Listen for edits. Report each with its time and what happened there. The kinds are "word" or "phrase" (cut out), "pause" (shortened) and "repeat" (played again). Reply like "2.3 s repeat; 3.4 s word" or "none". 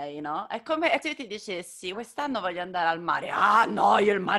1.0 s word; 1.9 s word